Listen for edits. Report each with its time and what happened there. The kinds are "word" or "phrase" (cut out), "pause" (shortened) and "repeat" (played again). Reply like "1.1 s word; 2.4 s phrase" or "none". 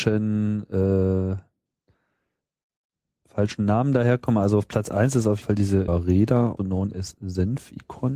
5.4 s word; 5.9 s word; 6.6 s word